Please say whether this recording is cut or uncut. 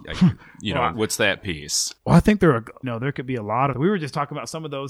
cut